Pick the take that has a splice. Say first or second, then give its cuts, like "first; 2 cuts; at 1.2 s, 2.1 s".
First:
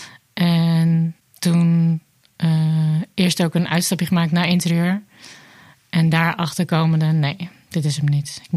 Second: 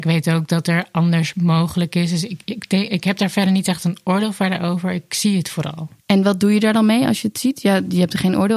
second; 1 cut; at 6.0 s